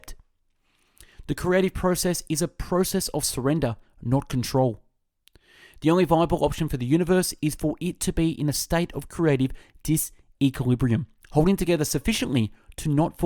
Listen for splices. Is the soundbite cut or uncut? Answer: uncut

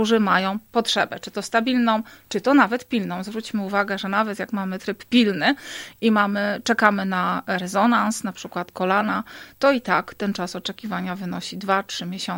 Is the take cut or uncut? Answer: uncut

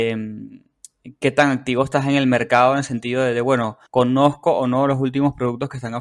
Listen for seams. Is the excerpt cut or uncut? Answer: cut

